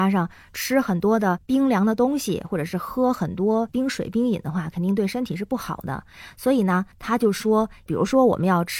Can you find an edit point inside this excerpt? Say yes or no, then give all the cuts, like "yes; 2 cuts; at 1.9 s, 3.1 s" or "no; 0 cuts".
yes; 1 cut; at 6.9 s